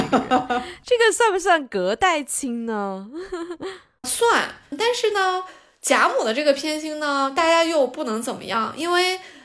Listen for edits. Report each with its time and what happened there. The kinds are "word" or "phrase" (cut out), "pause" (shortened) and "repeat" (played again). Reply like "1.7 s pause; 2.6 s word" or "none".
4.0 s word